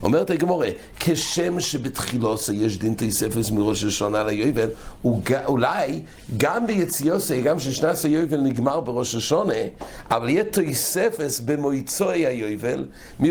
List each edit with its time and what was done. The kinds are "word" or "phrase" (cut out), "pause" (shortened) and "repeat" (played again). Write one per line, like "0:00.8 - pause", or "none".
none